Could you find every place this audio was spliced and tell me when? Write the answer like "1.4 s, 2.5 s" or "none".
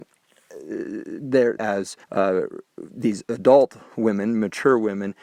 1.6 s, 2.0 s